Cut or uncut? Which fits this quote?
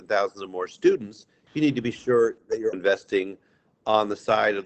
cut